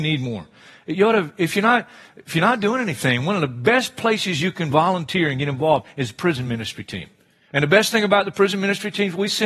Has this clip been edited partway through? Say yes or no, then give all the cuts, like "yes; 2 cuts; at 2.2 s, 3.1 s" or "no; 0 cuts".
no; 0 cuts